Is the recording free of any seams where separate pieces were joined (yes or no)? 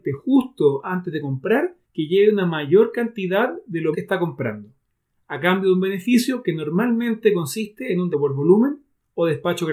no